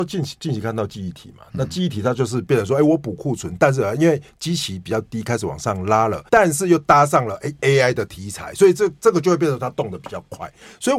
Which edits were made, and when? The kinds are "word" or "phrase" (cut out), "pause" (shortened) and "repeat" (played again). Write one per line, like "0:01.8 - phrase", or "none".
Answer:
0:06.3 - pause

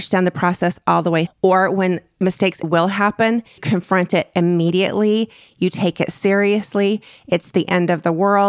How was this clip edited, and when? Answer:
0:01.3 - word
0:02.6 - word
0:03.6 - word

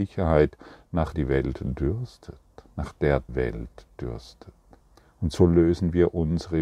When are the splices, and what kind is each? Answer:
0:01.1 - word
0:03.3 - word
0:04.8 - pause

